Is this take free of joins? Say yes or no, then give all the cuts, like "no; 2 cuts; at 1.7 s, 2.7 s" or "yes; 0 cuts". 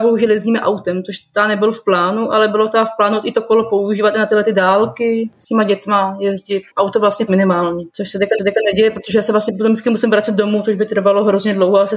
no; 3 cuts; at 6.7 s, 7.3 s, 8.4 s